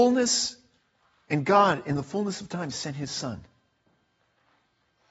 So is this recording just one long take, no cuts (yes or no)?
yes